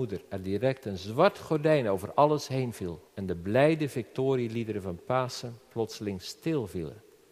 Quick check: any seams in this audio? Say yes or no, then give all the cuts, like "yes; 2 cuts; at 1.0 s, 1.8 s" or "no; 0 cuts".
yes; 1 cut; at 3.1 s